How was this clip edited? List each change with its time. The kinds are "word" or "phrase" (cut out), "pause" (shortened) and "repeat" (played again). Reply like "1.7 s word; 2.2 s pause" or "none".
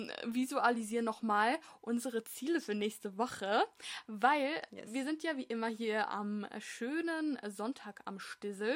none